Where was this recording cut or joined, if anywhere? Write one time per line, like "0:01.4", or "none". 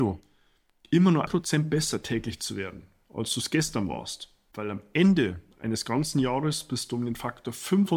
0:01.3